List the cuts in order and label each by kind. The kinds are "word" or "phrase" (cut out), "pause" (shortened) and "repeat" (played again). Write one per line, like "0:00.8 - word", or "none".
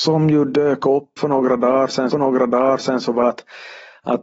0:01.2 - phrase
0:02.1 - repeat
0:03.2 - word